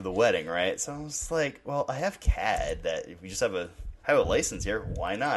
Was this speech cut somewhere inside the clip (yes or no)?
yes